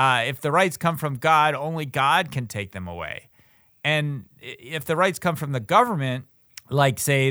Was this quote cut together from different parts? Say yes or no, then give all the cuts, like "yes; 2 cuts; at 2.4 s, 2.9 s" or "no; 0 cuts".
no; 0 cuts